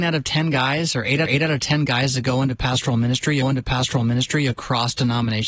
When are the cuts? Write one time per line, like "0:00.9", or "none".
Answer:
0:01.3
0:03.4

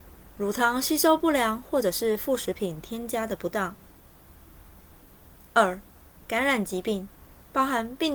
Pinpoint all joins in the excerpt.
none

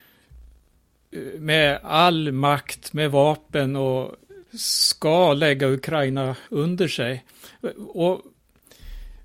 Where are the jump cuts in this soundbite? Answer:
0:04.5
0:06.5

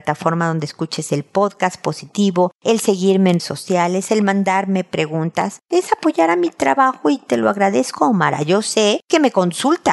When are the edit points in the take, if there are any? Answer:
0:03.4

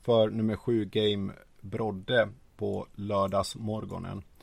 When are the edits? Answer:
none

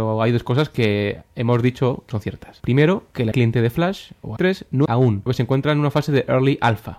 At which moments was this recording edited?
0:02.1
0:03.3
0:04.4
0:04.9
0:05.3

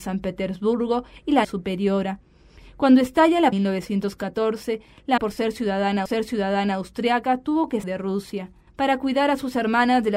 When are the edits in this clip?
0:01.4
0:03.5
0:05.2
0:06.1
0:07.8
0:08.7

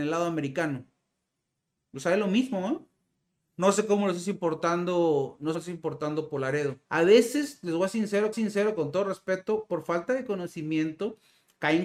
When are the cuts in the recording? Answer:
0:05.5
0:06.8
0:08.3

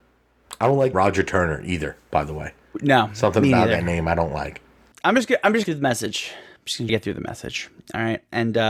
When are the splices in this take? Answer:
0:00.9
0:05.6
0:06.9

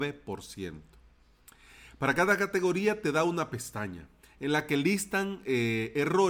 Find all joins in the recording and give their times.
none

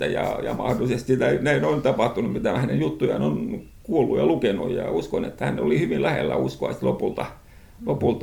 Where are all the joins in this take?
none

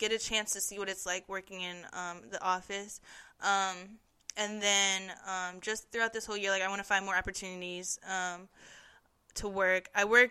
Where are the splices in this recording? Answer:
none

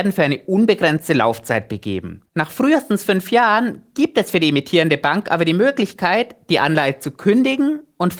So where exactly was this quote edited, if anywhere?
0:02.3

